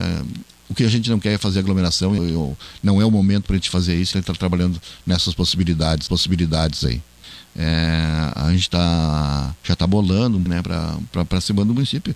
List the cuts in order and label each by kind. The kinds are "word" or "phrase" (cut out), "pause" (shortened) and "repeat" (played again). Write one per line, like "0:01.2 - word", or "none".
0:02.2 - word
0:04.1 - word
0:06.1 - repeat
0:09.6 - pause
0:10.5 - word